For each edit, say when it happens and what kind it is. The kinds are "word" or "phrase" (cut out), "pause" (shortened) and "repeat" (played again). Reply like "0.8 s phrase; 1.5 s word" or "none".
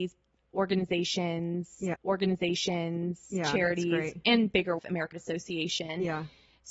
1.9 s repeat; 4.8 s phrase; 5.1 s word